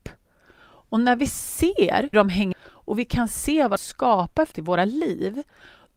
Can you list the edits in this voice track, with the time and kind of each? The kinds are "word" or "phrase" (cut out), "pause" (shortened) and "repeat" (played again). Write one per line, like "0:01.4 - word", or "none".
0:02.1 - word
0:02.5 - word
0:03.8 - word
0:04.5 - word